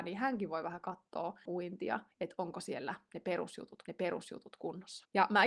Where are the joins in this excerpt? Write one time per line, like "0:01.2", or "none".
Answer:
0:01.5
0:02.1
0:03.8